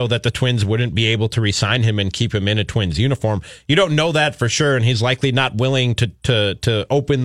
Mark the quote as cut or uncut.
uncut